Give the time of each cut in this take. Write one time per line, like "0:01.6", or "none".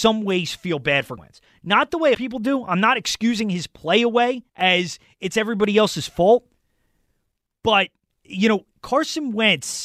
0:01.2
0:02.1
0:04.5
0:08.1
0:08.7